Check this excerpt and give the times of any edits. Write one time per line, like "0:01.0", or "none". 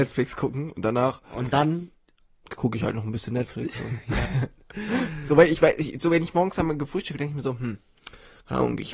none